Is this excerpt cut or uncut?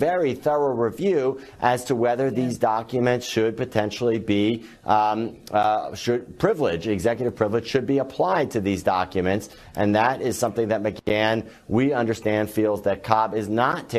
uncut